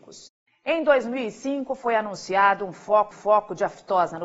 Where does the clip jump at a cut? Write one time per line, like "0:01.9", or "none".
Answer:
0:03.1